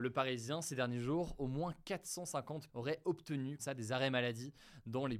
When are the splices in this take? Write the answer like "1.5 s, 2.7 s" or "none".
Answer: 2.7 s, 3.6 s